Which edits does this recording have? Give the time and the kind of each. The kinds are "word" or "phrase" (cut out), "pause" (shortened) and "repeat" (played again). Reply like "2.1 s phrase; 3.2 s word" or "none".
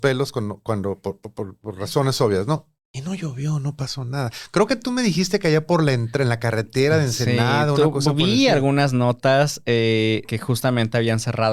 10.2 s word